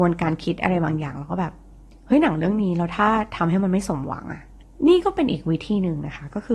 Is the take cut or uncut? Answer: uncut